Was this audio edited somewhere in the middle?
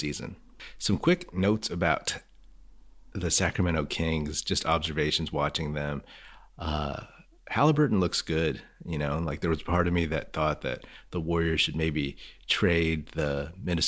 no; 0 cuts

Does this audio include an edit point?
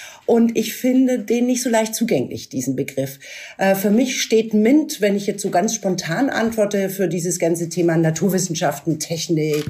no; 0 cuts

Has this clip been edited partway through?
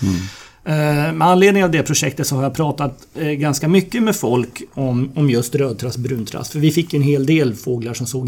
no; 0 cuts

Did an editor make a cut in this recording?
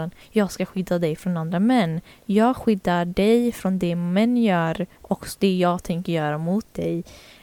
yes; 1 cut; at 4.9 s

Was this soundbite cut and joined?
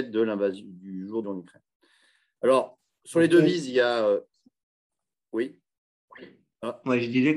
yes; 1 cut; at 1.2 s

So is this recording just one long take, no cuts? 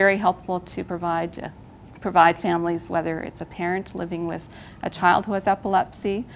yes; 0 cuts

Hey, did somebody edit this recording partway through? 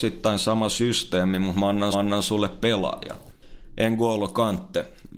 yes; 1 cut; at 1.9 s

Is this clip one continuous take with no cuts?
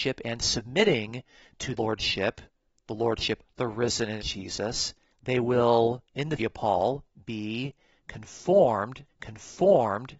no; 7 cuts; at 1.8 s, 3.4 s, 4.2 s, 5.1 s, 6.1 s, 6.4 s, 9.1 s

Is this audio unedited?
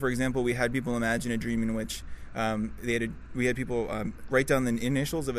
yes; 0 cuts

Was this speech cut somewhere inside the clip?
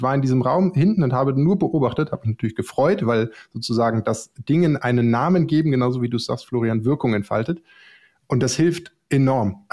no; 0 cuts

